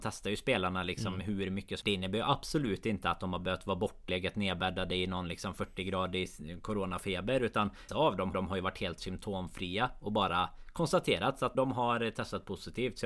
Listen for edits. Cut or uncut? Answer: cut